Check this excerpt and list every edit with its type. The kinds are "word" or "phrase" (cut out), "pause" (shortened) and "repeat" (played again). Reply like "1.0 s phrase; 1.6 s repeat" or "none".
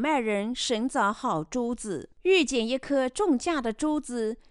2.1 s pause

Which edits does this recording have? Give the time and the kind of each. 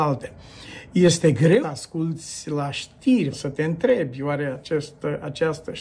1.6 s word; 3.3 s word

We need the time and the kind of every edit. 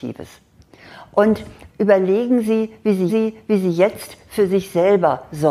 1.7 s word; 3.1 s repeat

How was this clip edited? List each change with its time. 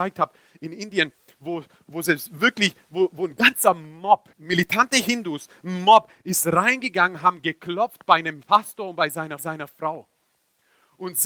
4.3 s pause; 9.4 s repeat

